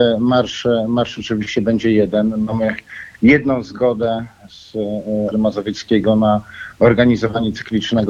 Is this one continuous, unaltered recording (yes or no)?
no